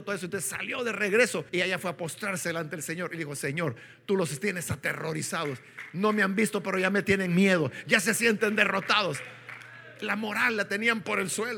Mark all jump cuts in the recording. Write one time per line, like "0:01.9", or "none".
0:01.5